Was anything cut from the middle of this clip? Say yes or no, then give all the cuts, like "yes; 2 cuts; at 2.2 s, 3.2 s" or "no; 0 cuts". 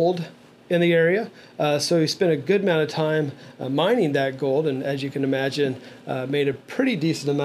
no; 0 cuts